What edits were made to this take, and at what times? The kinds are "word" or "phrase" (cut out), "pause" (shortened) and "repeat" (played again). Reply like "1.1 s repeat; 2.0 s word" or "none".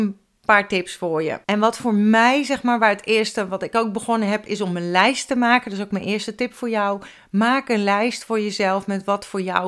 1.4 s pause

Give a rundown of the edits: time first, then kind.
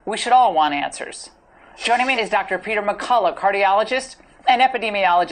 2.2 s word

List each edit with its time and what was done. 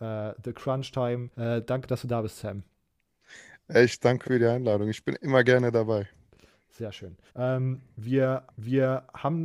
1.3 s pause; 4.2 s word; 7.3 s pause; 8.5 s repeat

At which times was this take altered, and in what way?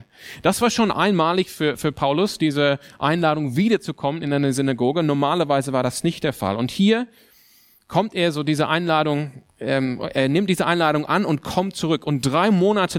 none

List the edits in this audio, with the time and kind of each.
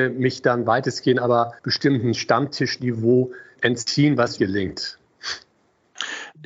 1.6 s pause; 3.6 s word; 4.4 s word

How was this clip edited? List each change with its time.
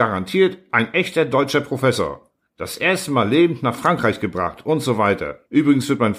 2.5 s pause

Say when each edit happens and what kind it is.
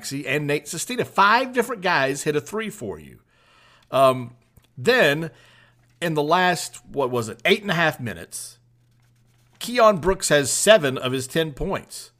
none

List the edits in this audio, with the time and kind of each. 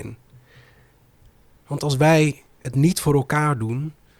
none

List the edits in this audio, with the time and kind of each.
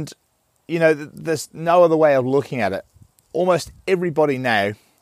none

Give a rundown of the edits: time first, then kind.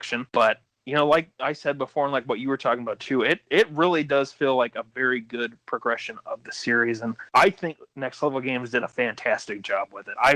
none

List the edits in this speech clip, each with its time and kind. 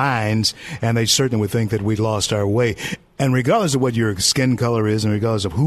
none

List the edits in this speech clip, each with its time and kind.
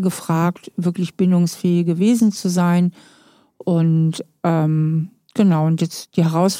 none

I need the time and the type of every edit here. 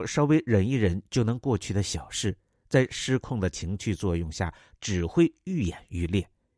none

